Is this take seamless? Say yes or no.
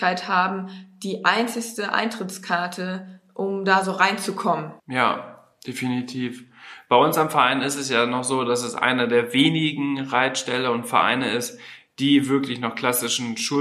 no